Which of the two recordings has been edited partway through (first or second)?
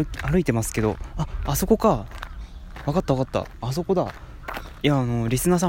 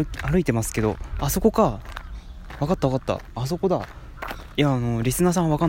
second